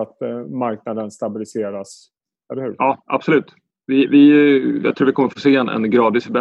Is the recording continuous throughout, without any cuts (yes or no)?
yes